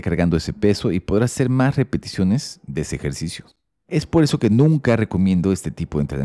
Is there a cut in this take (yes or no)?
no